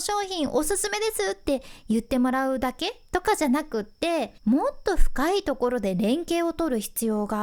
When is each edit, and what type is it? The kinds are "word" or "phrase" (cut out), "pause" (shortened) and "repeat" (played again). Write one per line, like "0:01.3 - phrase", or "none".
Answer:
0:04.4 - pause